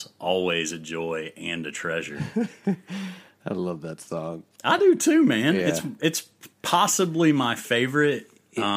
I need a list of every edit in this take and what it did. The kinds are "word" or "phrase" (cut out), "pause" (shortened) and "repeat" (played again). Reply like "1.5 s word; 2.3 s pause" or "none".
none